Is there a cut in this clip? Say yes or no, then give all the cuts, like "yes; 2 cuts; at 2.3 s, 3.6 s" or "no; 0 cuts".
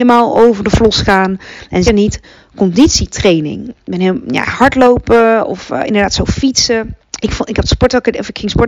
yes; 2 cuts; at 1.8 s, 7.0 s